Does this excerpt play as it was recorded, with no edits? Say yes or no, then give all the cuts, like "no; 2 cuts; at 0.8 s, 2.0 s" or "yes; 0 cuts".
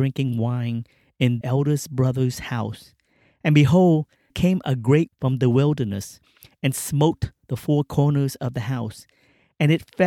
no; 3 cuts; at 1.4 s, 4.3 s, 5.1 s